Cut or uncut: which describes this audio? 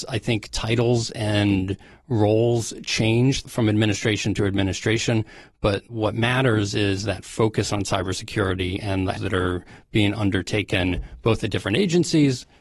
cut